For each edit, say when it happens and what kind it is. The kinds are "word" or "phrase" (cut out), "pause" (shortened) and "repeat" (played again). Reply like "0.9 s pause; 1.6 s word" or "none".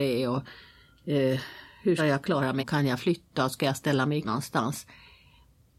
2.0 s word; 2.6 s word; 4.2 s word